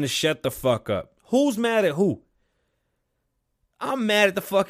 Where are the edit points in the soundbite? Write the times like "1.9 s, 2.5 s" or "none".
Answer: 1.2 s